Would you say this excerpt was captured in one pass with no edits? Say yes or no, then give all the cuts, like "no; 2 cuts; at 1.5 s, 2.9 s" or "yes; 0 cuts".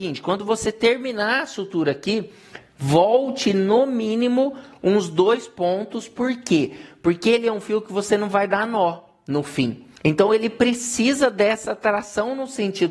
no; 1 cut; at 9.9 s